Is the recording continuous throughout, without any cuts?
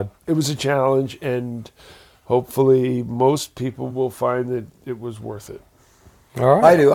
yes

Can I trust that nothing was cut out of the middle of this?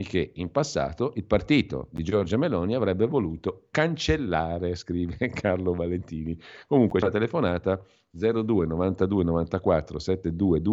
no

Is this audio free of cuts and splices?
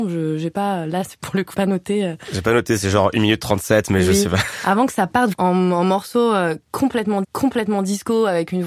no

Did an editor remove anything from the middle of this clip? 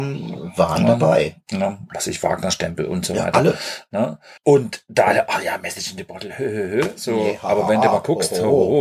yes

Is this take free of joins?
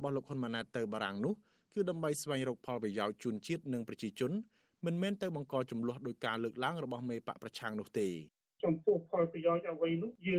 yes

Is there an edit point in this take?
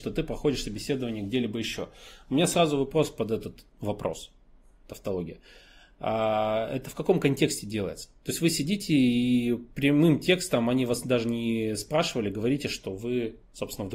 no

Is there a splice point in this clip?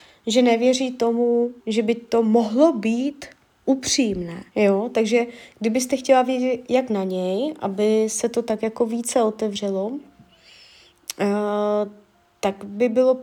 yes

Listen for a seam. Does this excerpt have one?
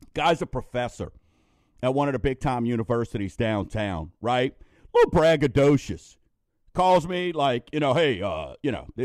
no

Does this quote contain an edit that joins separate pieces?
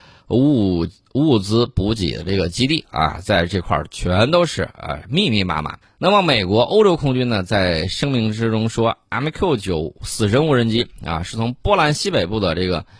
yes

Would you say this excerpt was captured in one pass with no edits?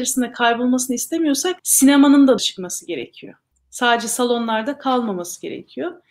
no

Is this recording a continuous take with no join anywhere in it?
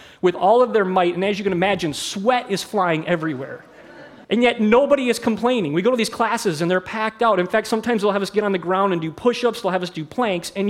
no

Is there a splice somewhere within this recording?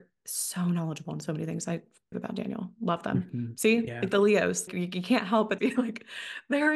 yes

